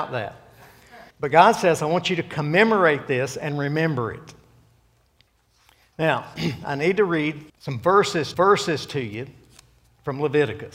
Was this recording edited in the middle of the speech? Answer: yes; 3 cuts; at 1.1 s, 7.5 s, 8.3 s

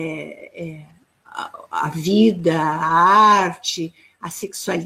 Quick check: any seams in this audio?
no; 0 cuts

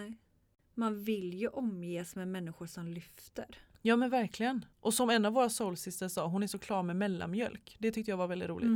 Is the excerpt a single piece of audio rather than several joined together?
no; 1 cut; at 4.7 s

